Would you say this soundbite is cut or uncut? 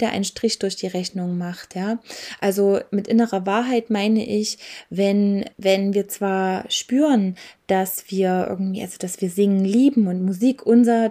cut